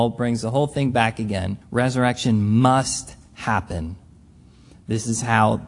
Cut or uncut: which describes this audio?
cut